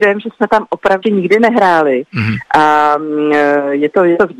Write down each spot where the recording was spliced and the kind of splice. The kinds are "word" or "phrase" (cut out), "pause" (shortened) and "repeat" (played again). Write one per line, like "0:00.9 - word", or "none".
0:01.0 - word